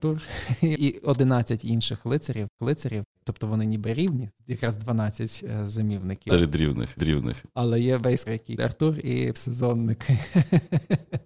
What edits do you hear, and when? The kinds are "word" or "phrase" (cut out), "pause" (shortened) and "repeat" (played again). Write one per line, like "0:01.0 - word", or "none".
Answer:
0:02.6 - repeat
0:06.3 - phrase
0:07.0 - repeat
0:08.3 - word
0:08.6 - word
0:09.3 - word